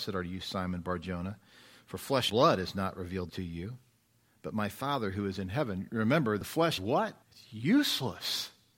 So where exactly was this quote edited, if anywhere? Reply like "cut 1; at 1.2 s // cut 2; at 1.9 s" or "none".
cut 1; at 2.3 s // cut 2; at 3.3 s // cut 3; at 6.8 s // cut 4; at 7.2 s

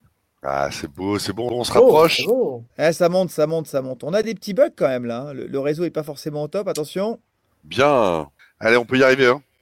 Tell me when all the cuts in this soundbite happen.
cut 1; at 2.7 s // cut 2; at 8.4 s

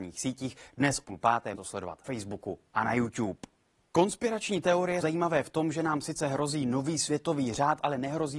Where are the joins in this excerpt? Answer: cut 1; at 1.0 s // cut 2; at 1.5 s // cut 3; at 2.0 s // cut 4; at 5.0 s

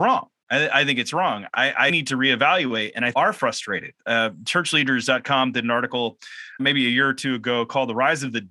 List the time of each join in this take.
cut 1; at 1.9 s // cut 2; at 3.1 s // cut 3; at 6.6 s

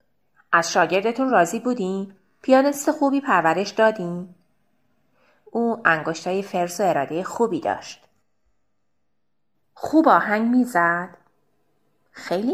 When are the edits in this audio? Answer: none

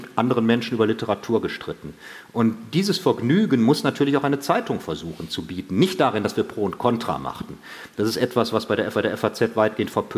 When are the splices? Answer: cut 1; at 8.9 s

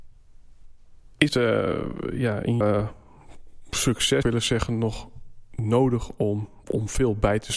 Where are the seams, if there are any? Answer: cut 1; at 1.3 s // cut 2; at 2.6 s // cut 3; at 4.2 s // cut 4; at 6.6 s

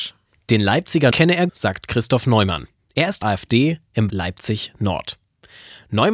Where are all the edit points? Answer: cut 1; at 1.1 s // cut 2; at 1.5 s // cut 3; at 3.2 s // cut 4; at 4.1 s

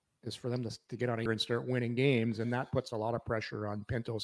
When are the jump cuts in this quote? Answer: cut 1; at 1.3 s // cut 2; at 2.4 s

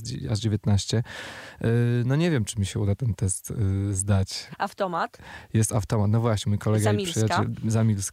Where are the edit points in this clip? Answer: none

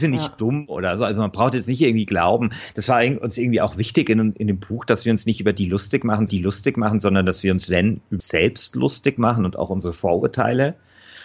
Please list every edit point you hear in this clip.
cut 1; at 6.3 s // cut 2; at 8.2 s

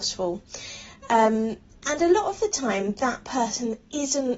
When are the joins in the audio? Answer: none

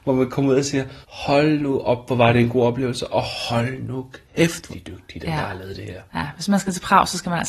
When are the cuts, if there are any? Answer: cut 1; at 1.0 s // cut 2; at 4.3 s // cut 3; at 4.7 s

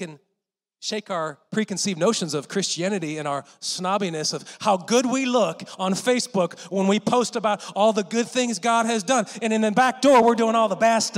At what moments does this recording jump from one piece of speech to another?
none

